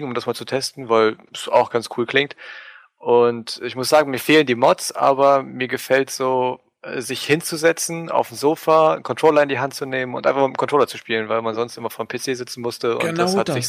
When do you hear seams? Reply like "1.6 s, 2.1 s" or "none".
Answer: none